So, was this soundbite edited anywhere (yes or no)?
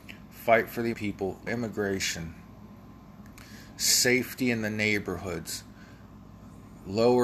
yes